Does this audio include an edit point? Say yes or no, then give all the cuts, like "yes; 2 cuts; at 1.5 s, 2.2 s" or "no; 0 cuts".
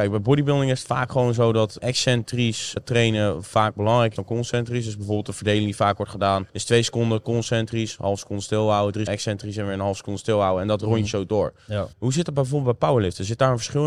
yes; 6 cuts; at 1.8 s, 2.8 s, 4.2 s, 6.5 s, 9.1 s, 11.9 s